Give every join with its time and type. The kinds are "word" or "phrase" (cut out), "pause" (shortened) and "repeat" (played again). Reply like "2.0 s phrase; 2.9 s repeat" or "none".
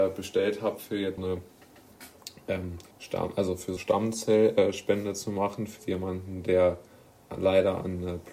1.2 s word; 2.9 s pause; 3.8 s word; 5.8 s word